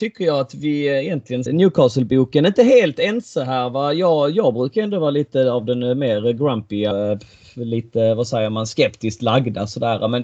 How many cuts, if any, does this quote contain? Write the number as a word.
two